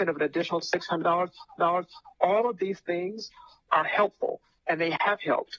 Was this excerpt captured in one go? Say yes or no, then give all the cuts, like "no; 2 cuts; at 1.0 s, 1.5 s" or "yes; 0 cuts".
no; 2 cuts; at 1.6 s, 3.7 s